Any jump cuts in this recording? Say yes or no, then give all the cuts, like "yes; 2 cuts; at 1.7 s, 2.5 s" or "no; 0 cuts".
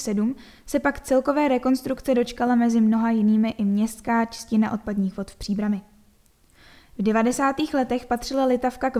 no; 0 cuts